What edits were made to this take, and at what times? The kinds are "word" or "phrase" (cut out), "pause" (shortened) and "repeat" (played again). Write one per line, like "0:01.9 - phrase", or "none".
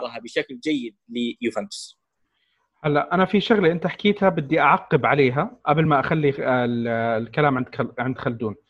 none